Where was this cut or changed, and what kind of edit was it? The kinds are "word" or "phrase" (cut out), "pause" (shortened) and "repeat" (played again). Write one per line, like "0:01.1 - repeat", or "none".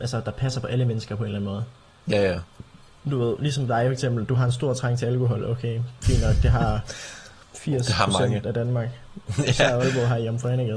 none